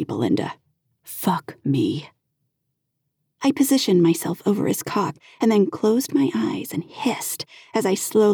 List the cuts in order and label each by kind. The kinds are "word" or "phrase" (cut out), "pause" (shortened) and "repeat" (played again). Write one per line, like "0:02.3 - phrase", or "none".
none